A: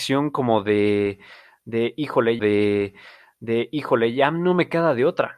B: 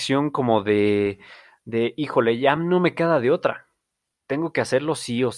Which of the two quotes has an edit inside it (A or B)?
A